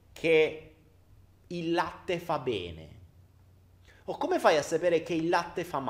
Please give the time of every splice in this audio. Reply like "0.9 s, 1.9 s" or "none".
none